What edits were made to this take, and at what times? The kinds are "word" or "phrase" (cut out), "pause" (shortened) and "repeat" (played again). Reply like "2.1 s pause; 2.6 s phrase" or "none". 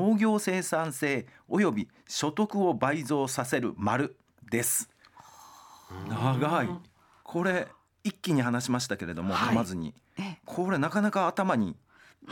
none